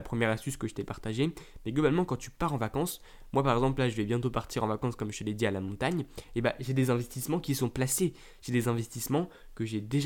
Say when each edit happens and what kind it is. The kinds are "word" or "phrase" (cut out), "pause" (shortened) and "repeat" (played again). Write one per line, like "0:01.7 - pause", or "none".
none